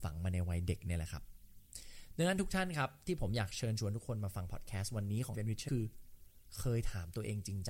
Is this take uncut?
no; 2 cuts; at 5.3 s, 5.7 s

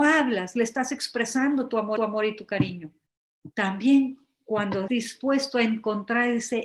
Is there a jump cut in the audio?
yes; 3 cuts; at 2.0 s, 3.5 s, 4.9 s

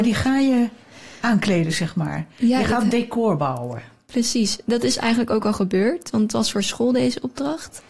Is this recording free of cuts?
yes; 0 cuts

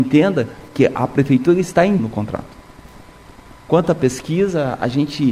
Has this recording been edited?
yes; 1 cut; at 2.0 s

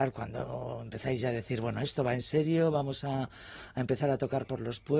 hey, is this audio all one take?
yes; 0 cuts

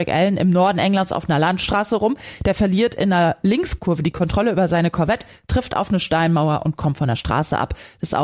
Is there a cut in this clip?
no; 0 cuts

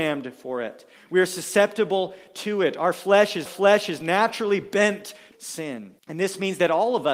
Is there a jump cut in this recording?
yes; 3 cuts; at 3.5 s, 5.3 s, 6.0 s

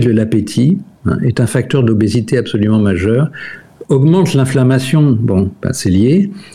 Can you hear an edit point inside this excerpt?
no; 0 cuts

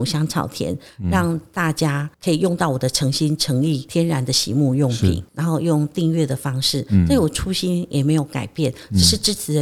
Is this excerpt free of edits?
no; 1 cut; at 2.1 s

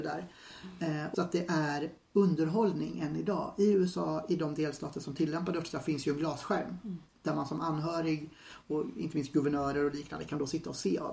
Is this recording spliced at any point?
yes; 1 cut; at 1.1 s

